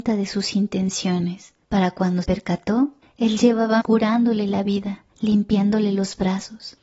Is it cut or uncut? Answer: cut